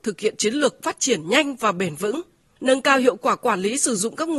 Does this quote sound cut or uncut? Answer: uncut